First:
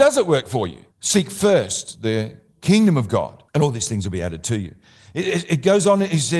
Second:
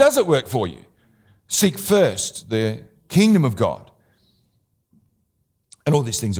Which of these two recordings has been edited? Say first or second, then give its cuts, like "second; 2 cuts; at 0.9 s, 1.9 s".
first; 2 cuts; at 0.9 s, 3.5 s